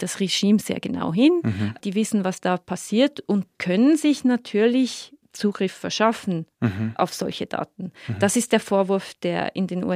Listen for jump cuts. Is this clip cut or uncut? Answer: cut